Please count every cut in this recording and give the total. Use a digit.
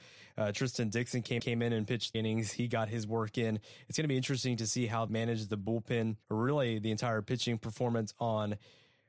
4